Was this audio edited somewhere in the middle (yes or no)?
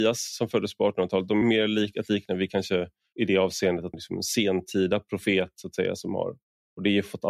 yes